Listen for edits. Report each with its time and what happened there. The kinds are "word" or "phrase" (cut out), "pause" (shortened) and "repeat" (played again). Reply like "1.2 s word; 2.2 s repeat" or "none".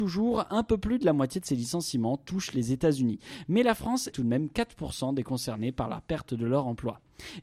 4.1 s phrase